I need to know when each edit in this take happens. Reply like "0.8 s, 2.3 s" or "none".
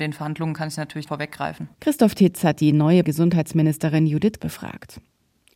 1.1 s, 1.7 s, 3.0 s, 4.4 s